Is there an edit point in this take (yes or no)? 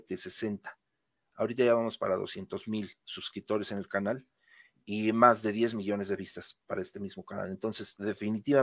no